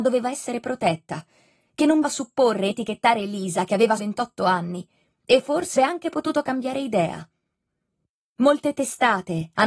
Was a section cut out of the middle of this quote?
yes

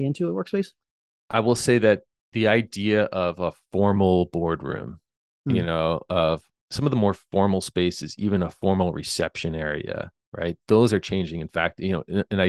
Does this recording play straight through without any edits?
yes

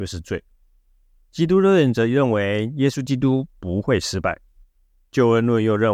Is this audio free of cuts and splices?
yes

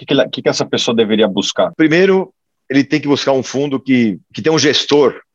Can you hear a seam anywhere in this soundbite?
no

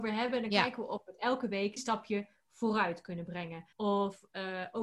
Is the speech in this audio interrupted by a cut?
yes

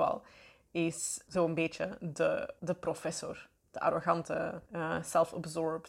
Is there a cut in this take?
yes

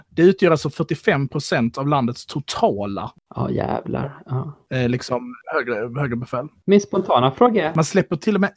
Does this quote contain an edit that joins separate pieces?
no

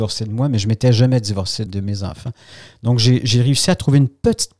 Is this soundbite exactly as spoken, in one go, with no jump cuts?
no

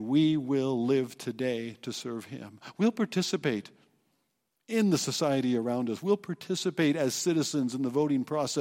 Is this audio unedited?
yes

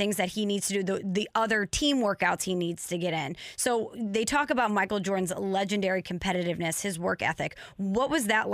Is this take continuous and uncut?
yes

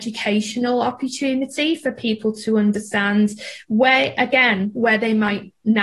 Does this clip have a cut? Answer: no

